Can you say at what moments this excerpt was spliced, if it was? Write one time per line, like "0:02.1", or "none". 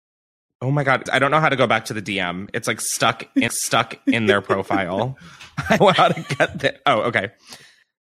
0:01.1
0:03.5
0:05.8